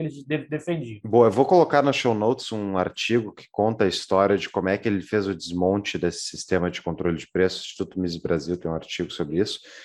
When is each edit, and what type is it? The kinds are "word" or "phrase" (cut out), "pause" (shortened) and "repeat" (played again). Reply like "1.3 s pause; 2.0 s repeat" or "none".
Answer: none

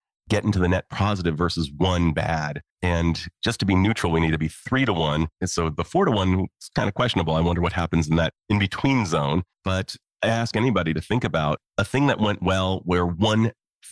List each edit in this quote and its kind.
2.7 s pause; 5.3 s pause; 8.4 s pause; 9.5 s pause; 11.7 s pause

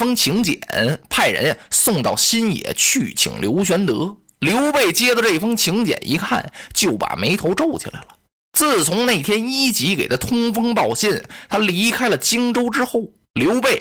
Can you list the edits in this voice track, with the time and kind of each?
none

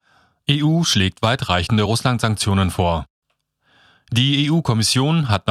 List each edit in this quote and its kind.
none

